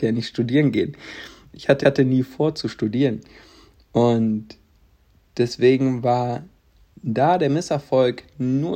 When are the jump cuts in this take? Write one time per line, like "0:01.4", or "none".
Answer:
0:01.8

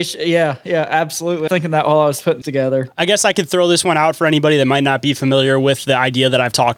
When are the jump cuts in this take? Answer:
0:01.5
0:02.4

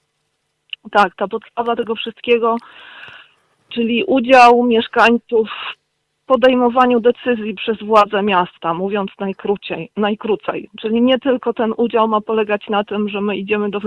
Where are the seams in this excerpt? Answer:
none

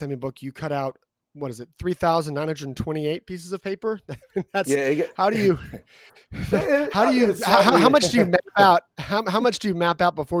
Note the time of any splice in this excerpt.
none

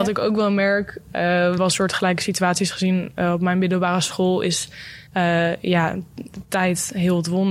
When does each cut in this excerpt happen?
0:01.6
0:05.1

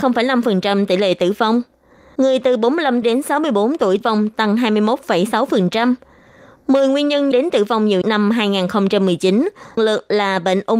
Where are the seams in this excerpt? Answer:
0:03.0
0:04.0
0:07.3
0:08.0
0:09.8

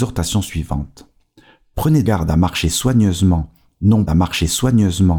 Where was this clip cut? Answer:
0:02.0
0:04.1

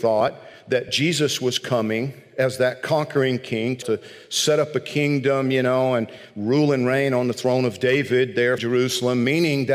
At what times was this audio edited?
0:03.8
0:08.6

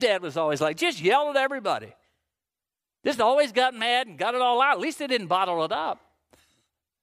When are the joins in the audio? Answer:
none

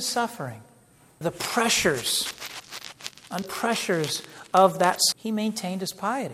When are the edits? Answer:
0:01.2
0:03.4
0:05.1

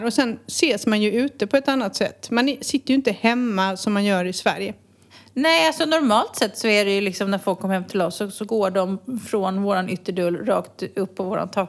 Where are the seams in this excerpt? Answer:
none

